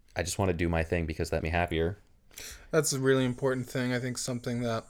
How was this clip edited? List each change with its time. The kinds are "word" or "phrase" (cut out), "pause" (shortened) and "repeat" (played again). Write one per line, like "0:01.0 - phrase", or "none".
0:01.4 - word

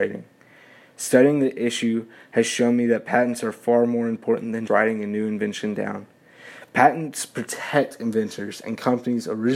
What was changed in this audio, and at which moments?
0:04.7 - word

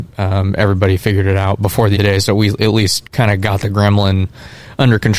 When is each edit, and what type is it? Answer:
0:02.0 - phrase
0:03.1 - pause

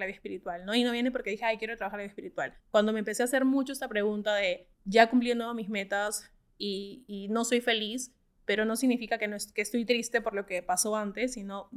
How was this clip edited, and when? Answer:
0:02.6 - pause
0:04.7 - pause

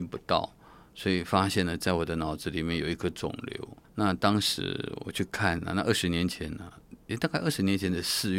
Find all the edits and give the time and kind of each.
0:03.8 - pause

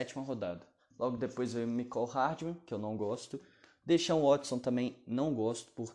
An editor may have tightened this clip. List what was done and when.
none

